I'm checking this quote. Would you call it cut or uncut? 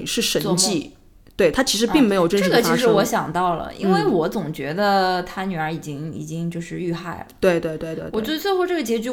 uncut